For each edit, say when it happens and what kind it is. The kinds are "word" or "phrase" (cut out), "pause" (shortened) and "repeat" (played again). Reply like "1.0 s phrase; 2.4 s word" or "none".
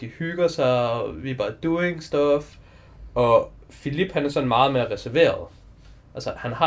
none